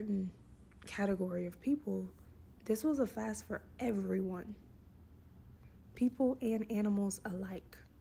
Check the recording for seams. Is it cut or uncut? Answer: uncut